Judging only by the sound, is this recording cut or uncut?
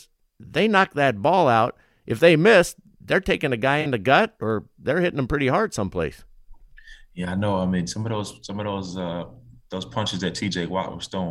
uncut